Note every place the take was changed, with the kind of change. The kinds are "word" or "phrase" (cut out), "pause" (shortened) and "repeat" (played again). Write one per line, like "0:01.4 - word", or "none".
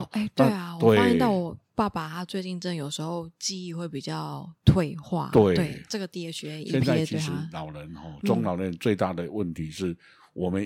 none